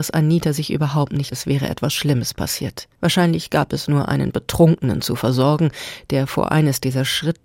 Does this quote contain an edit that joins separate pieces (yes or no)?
yes